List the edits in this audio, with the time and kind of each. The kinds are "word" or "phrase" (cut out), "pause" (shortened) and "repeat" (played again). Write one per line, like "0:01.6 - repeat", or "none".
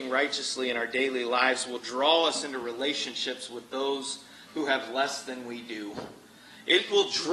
none